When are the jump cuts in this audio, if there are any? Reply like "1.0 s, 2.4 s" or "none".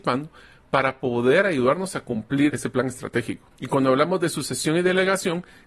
2.5 s, 3.5 s